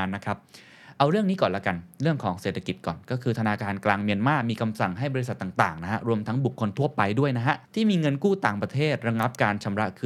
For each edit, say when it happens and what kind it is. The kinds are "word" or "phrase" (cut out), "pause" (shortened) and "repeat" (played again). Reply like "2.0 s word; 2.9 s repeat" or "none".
7.6 s pause